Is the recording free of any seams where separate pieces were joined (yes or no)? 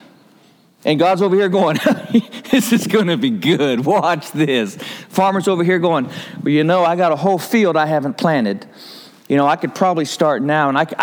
yes